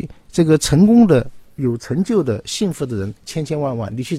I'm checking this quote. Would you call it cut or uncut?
cut